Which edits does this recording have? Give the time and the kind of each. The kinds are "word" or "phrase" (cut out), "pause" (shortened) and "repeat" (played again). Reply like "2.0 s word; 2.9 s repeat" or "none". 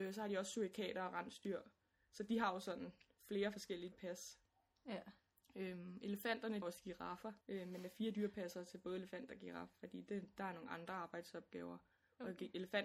3.9 s word; 6.6 s phrase; 7.4 s pause